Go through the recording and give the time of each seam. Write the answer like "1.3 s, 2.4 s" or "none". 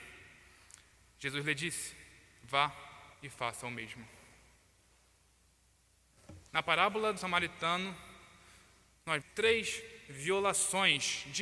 3.1 s, 6.5 s, 7.2 s, 9.2 s